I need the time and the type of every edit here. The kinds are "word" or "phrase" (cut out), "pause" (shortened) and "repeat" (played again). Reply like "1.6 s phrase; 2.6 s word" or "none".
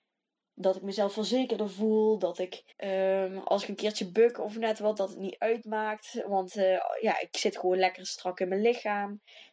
2.7 s pause

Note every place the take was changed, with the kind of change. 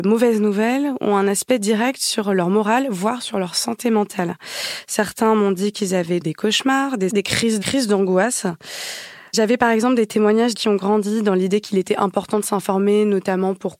6.2 s word; 7.1 s word; 7.6 s phrase; 10.5 s word

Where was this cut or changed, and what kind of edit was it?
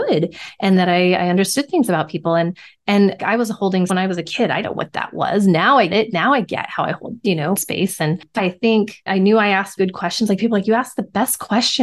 3.2 s word; 3.9 s word; 4.6 s word; 5.9 s word; 7.5 s word; 8.4 s word; 9.1 s word; 9.8 s word

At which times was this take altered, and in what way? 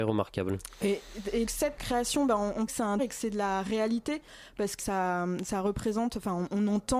1.5 s word; 1.8 s word; 2.7 s phrase; 3.0 s word; 4.8 s word

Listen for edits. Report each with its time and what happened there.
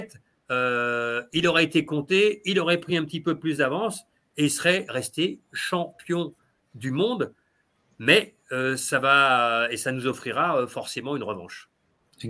none

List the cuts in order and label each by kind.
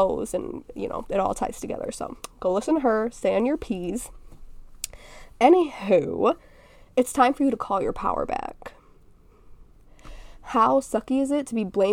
none

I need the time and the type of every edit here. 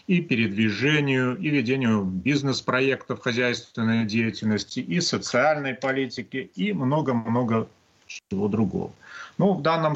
none

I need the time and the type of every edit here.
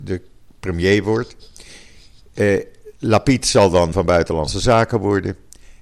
3.9 s word

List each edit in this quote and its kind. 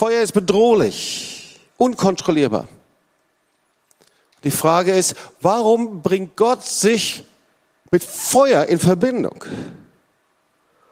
none

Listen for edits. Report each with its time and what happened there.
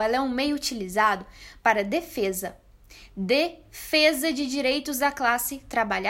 none

